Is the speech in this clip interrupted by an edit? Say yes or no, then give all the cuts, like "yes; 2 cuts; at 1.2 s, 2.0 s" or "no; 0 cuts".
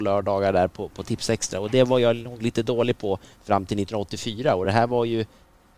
no; 0 cuts